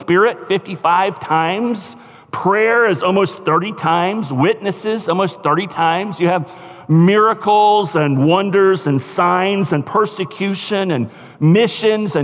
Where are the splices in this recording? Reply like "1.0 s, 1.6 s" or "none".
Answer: none